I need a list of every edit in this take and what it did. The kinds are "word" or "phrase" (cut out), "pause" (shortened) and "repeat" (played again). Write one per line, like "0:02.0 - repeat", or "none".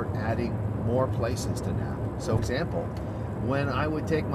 0:02.4 - word